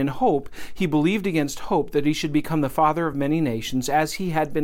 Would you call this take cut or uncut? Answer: uncut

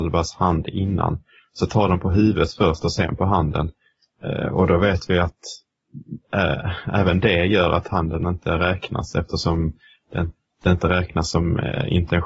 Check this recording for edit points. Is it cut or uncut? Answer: uncut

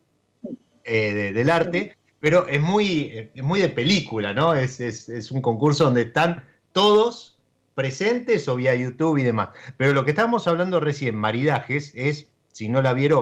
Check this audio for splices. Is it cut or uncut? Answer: uncut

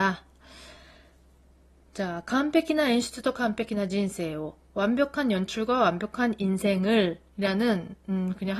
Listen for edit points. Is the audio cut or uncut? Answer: uncut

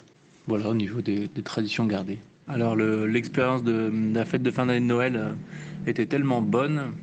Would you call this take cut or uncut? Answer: uncut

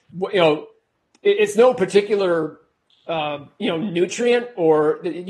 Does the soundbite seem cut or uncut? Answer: uncut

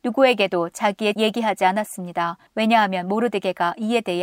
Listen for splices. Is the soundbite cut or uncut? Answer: cut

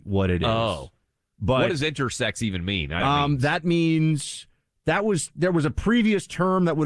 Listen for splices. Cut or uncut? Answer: cut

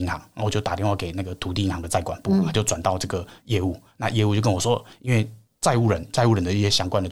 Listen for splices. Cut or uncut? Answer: uncut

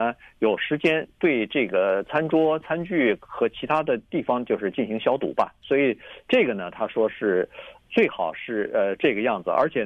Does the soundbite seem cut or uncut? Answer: uncut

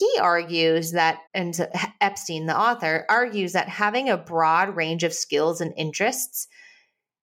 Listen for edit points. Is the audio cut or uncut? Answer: cut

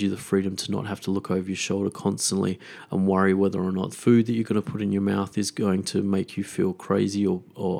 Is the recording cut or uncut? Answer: cut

